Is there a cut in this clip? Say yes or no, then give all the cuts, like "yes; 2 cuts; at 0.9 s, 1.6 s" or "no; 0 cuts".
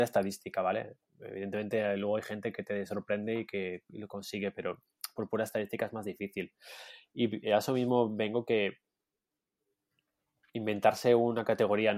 no; 0 cuts